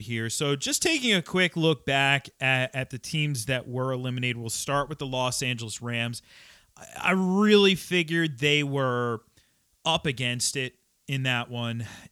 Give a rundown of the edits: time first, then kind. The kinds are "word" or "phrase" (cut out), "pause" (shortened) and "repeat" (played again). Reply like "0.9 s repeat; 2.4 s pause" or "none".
none